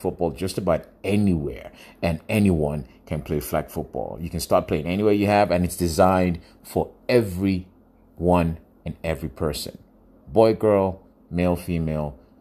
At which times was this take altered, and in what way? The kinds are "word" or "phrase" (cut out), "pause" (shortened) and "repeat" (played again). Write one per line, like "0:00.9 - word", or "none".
none